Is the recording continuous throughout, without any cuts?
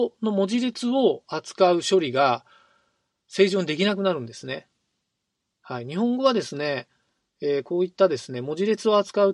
yes; 0 cuts

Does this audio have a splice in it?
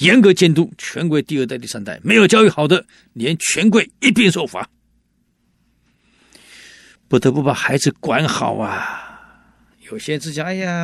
no; 0 cuts

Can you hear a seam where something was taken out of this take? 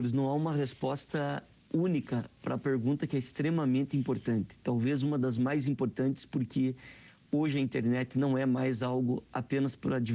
no; 0 cuts

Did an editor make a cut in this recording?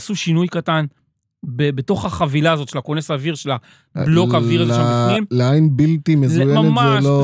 no; 0 cuts

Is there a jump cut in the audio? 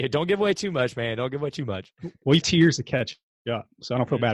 yes; 1 cut; at 2.4 s

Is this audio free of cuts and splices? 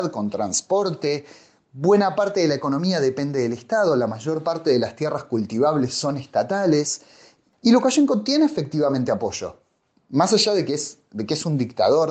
yes; 0 cuts

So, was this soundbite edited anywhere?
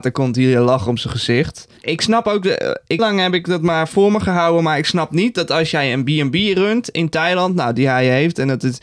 yes; 2 cuts; at 1.8 s, 3.0 s

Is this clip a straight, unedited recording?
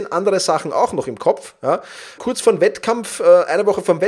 no; 1 cut; at 2.2 s

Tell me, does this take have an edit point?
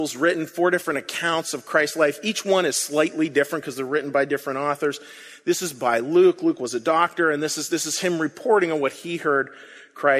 no; 0 cuts

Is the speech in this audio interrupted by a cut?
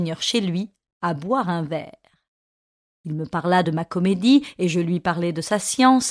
no; 0 cuts

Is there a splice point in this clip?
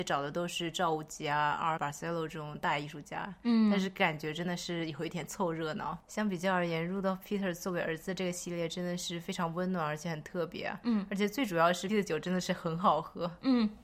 yes; 2 cuts; at 1.8 s, 11.9 s

